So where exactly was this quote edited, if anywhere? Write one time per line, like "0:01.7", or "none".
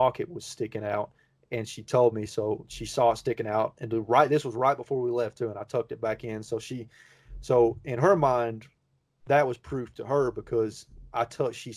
none